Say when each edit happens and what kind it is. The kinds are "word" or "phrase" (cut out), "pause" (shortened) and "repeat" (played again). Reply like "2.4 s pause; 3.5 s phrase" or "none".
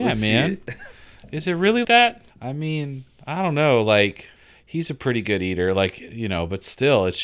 1.8 s word; 2.3 s pause; 4.4 s pause